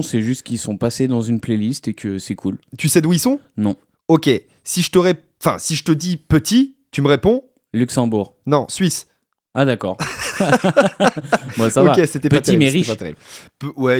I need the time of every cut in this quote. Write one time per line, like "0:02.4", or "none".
none